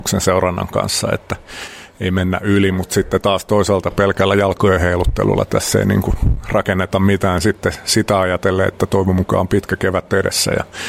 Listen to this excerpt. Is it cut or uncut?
uncut